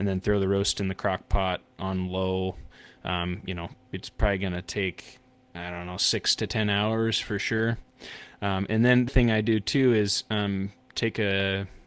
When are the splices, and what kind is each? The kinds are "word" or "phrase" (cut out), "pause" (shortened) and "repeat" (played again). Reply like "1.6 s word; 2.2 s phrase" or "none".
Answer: 5.3 s pause; 9.1 s word